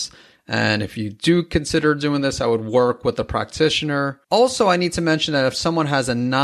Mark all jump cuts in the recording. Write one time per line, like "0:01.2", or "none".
0:04.2